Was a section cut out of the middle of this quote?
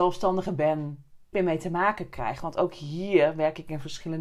yes; 1 cut; at 1.3 s

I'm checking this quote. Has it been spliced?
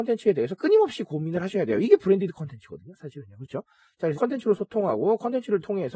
yes; 1 cut; at 4.1 s

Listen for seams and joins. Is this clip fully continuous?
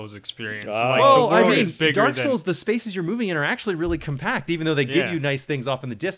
yes; 0 cuts

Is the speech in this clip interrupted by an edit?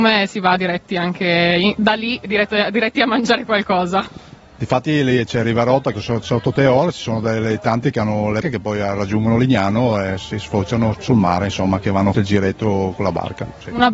yes; 4 cuts; at 5.9 s, 8.4 s, 10.9 s, 12.1 s

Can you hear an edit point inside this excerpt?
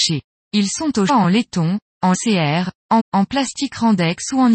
yes; 3 cuts; at 1.1 s, 2.1 s, 3.0 s

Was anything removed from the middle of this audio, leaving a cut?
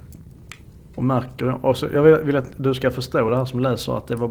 no; 0 cuts

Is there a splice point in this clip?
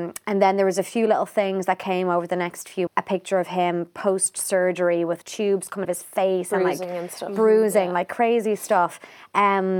yes; 3 cuts; at 2.9 s, 5.2 s, 5.8 s

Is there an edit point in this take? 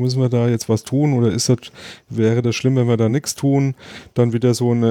no; 0 cuts

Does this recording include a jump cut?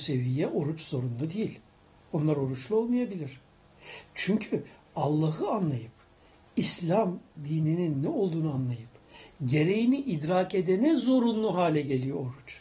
no; 0 cuts

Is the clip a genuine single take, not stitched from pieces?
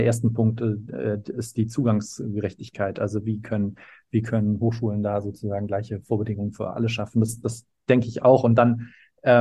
yes; 0 cuts

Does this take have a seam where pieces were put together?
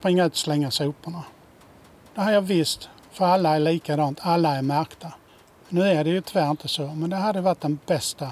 no; 0 cuts

